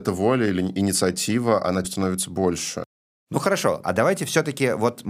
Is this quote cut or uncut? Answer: cut